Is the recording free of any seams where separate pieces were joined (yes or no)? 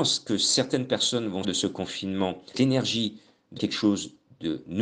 no